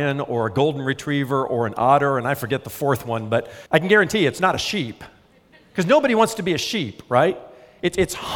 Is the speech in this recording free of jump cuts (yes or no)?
no